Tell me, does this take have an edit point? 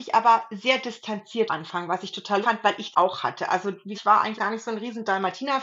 yes; 5 cuts; at 1.5 s, 2.4 s, 2.9 s, 3.9 s, 4.4 s

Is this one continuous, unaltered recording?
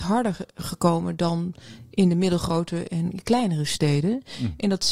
yes; 0 cuts

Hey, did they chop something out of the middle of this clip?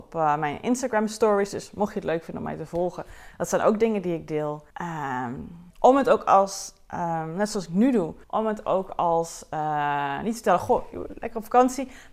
yes; 3 cuts; at 4.7 s, 5.7 s, 8.2 s

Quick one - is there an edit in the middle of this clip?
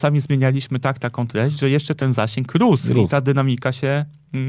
no; 0 cuts

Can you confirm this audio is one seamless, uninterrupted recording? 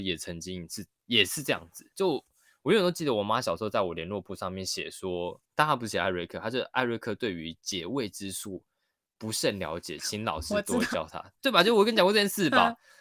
no; 2 cuts; at 1.9 s, 5.4 s

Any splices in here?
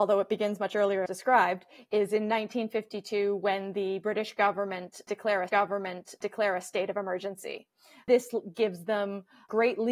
yes; 2 cuts; at 1.1 s, 5.5 s

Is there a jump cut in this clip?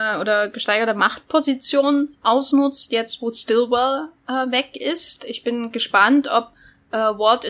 no; 0 cuts

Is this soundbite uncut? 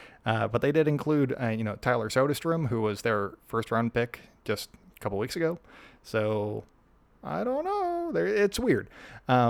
yes; 0 cuts

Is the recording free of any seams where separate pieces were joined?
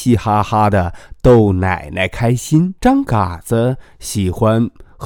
no; 1 cut; at 2.8 s

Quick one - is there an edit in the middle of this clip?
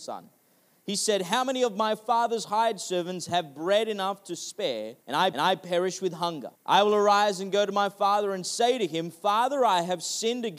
yes; 3 cuts; at 5.0 s, 5.3 s, 6.6 s

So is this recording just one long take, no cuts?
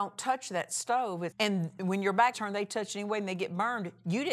no; 2 cuts; at 1.3 s, 2.3 s

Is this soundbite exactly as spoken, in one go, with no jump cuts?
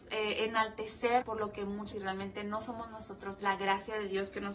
no; 3 cuts; at 1.2 s, 1.9 s, 3.4 s

